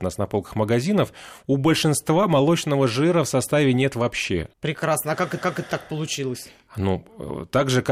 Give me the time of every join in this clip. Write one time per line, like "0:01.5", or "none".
0:04.5
0:05.4